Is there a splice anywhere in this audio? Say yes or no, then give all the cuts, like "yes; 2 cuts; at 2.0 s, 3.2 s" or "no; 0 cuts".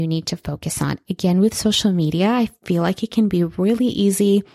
no; 0 cuts